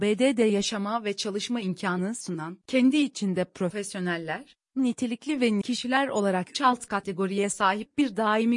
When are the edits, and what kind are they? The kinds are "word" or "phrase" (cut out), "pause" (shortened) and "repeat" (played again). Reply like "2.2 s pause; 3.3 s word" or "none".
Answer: 2.6 s pause; 5.6 s word; 6.5 s word

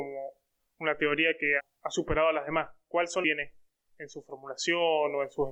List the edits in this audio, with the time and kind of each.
1.6 s word; 3.2 s phrase

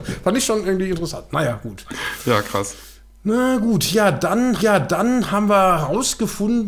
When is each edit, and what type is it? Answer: 4.6 s repeat

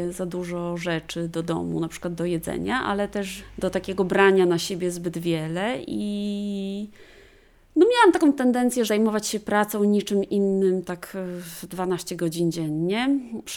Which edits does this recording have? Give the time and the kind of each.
8.9 s word

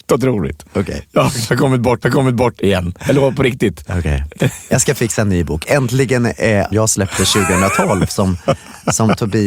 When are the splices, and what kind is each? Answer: 2.0 s repeat; 6.7 s phrase

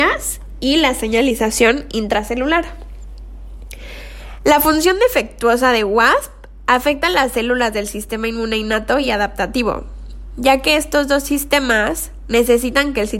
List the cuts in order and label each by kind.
none

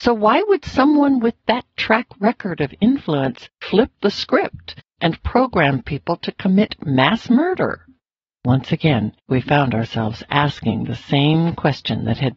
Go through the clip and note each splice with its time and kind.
3.5 s pause; 8.0 s pause; 9.2 s pause

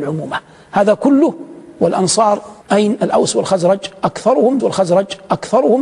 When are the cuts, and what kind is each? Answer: 2.6 s pause; 4.6 s repeat

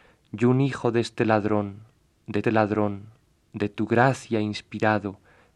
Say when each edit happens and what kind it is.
2.4 s repeat

